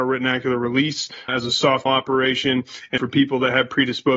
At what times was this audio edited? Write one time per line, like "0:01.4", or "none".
0:01.3
0:01.9
0:03.0